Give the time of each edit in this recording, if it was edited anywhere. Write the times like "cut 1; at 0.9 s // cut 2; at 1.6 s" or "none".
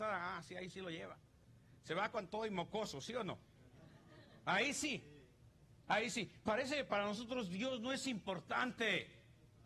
none